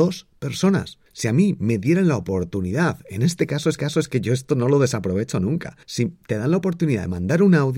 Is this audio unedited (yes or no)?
no